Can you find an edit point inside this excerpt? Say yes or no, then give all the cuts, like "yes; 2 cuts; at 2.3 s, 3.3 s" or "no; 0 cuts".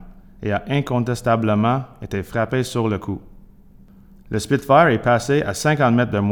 no; 0 cuts